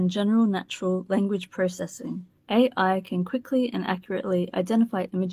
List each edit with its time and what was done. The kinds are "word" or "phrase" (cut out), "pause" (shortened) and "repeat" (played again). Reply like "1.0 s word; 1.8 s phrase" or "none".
2.4 s pause